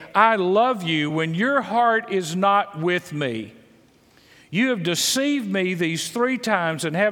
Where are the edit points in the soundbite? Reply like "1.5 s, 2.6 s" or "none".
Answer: none